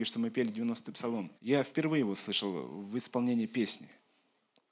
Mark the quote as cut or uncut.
cut